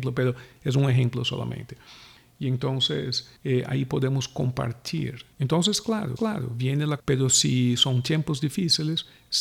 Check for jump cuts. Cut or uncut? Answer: cut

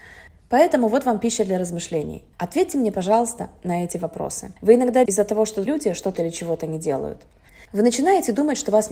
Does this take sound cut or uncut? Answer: cut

